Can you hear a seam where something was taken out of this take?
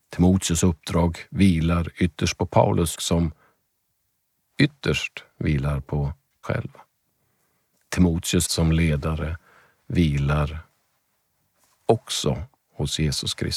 yes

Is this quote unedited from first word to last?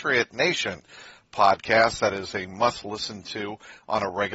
yes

